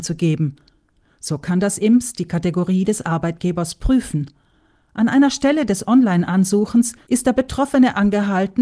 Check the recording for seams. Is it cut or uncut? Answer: uncut